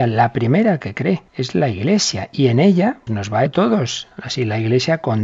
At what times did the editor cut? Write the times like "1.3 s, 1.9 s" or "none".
1.3 s, 3.1 s, 3.5 s